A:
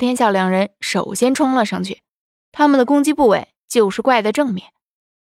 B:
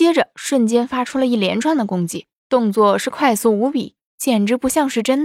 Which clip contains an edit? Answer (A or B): B